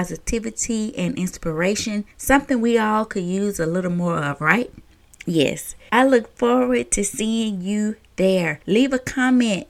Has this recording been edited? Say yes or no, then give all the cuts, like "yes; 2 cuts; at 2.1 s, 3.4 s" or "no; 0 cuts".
yes; 1 cut; at 5.0 s